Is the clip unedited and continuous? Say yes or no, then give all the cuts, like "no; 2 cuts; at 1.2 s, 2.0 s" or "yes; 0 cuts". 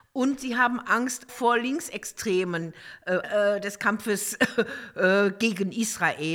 no; 2 cuts; at 1.3 s, 3.2 s